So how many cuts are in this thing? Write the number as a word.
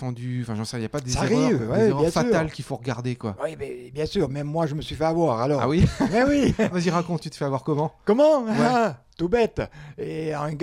one